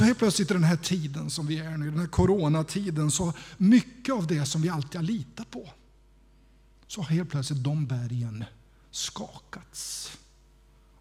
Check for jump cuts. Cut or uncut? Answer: uncut